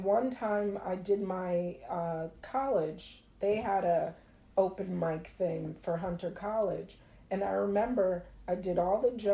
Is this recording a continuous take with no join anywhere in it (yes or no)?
yes